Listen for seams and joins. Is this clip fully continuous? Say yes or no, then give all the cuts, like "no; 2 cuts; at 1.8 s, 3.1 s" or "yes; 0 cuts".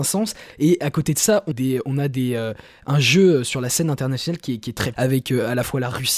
no; 2 cuts; at 1.5 s, 4.9 s